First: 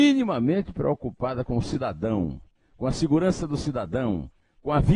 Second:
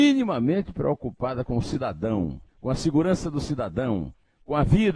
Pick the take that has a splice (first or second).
second